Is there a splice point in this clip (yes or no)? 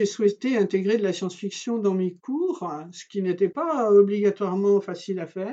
no